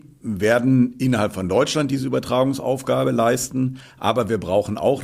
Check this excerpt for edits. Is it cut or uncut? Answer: uncut